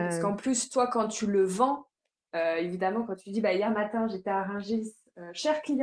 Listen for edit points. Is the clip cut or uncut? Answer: uncut